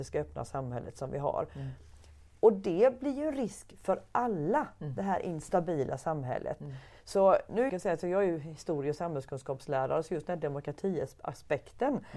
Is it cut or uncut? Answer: cut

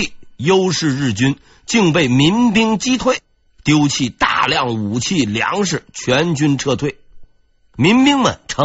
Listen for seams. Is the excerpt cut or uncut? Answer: uncut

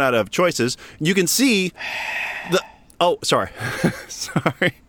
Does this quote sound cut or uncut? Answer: uncut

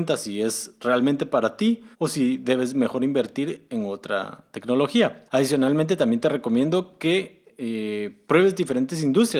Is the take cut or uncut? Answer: cut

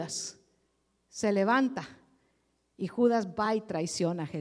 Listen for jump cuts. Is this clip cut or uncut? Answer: uncut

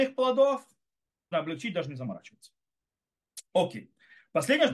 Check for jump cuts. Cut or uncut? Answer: cut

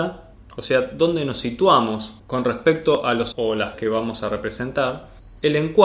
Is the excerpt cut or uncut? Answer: cut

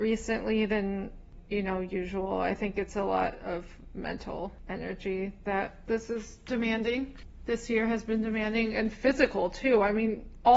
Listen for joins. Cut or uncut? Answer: uncut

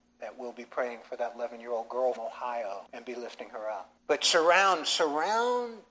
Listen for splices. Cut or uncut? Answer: cut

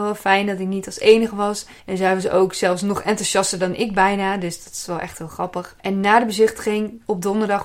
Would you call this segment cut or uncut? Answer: cut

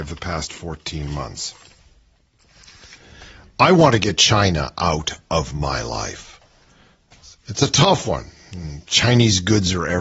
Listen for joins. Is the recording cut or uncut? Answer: uncut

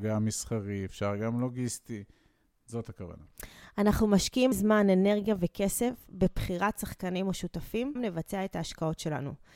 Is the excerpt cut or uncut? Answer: cut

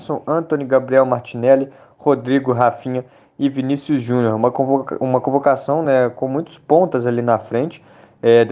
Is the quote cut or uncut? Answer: uncut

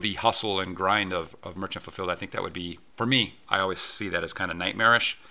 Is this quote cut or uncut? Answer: uncut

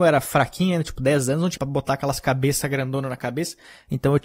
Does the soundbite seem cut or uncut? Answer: cut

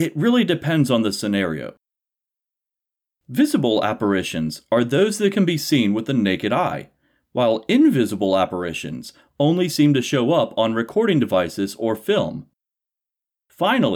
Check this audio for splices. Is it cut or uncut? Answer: uncut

